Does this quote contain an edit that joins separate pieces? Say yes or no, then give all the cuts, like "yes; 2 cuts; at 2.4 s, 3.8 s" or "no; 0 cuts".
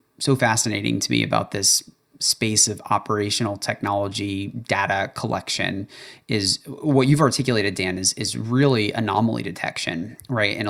no; 0 cuts